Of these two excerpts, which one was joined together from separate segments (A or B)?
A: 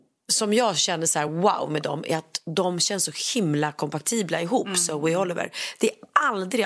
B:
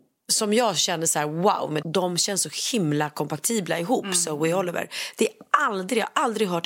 B